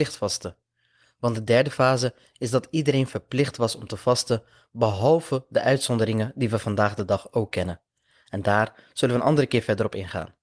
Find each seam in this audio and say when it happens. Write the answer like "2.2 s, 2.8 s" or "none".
none